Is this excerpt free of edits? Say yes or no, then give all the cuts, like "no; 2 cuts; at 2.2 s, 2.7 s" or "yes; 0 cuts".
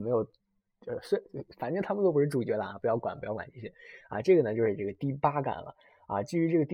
yes; 0 cuts